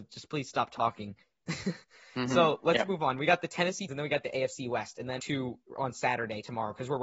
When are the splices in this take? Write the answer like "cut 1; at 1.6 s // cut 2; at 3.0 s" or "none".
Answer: cut 1; at 1.2 s // cut 2; at 3.9 s // cut 3; at 5.2 s